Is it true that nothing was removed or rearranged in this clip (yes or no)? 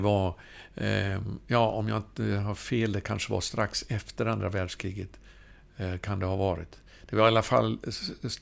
yes